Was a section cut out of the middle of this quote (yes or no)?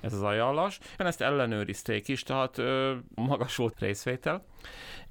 yes